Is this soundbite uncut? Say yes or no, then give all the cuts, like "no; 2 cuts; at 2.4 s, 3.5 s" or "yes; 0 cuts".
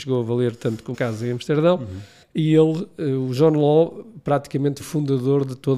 no; 3 cuts; at 0.9 s, 2.2 s, 4.8 s